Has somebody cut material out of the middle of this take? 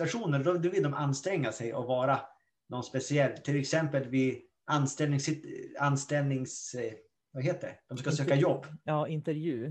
no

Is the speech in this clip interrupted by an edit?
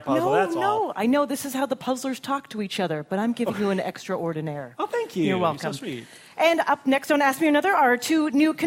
no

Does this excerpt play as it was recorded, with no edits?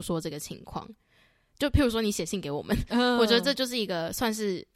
yes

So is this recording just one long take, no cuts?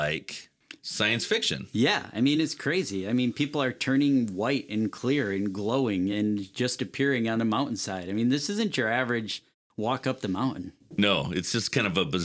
yes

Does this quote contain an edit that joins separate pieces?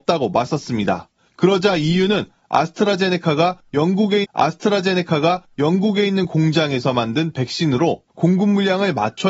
yes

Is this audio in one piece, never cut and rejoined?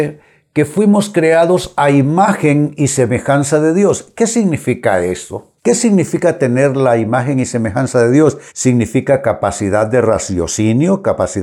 no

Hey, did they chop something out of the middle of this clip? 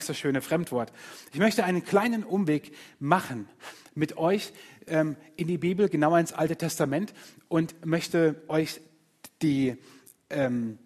no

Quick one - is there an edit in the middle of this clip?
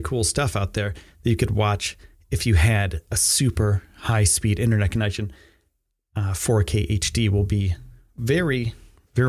no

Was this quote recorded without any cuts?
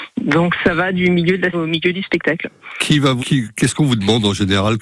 no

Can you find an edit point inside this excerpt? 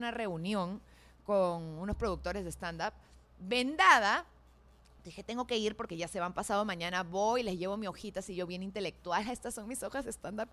no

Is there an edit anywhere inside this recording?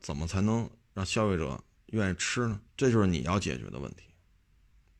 yes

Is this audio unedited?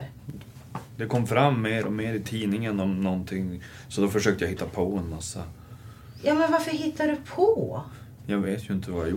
yes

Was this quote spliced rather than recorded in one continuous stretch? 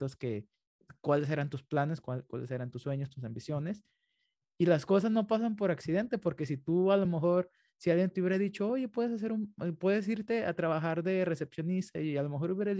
no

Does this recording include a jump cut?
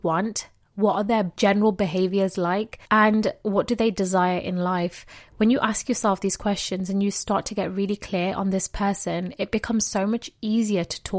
yes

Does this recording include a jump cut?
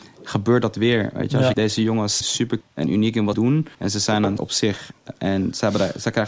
yes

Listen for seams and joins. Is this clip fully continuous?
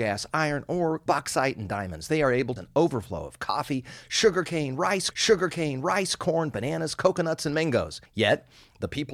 no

